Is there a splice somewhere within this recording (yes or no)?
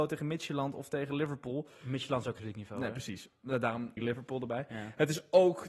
yes